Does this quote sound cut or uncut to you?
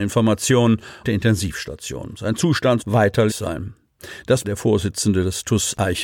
cut